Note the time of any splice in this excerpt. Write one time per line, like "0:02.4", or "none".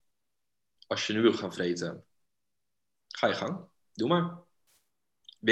none